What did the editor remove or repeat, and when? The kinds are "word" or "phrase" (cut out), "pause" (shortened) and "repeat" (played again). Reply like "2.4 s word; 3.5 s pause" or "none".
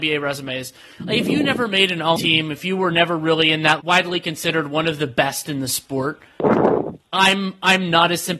2.2 s word; 3.8 s word